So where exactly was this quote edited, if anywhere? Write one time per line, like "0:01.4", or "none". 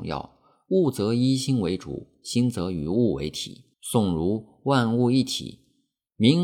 0:03.7